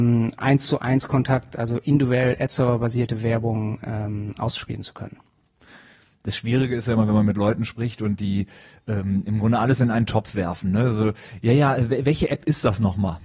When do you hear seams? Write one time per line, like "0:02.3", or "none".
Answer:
none